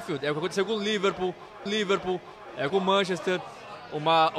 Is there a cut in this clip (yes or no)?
yes